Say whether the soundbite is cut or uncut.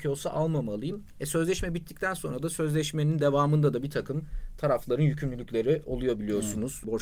uncut